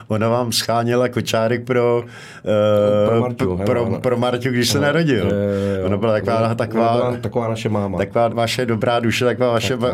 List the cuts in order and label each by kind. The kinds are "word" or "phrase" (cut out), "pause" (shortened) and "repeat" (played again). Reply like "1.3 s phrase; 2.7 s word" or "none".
8.3 s word